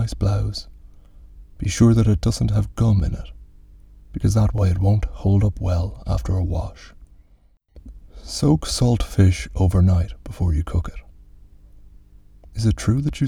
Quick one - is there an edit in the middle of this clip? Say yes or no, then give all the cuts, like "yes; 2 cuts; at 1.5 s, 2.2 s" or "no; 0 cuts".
no; 0 cuts